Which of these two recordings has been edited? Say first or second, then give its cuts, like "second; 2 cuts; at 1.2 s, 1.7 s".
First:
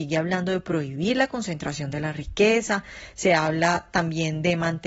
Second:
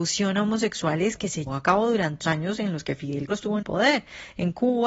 second; 4 cuts; at 1.5 s, 2.2 s, 3.3 s, 3.6 s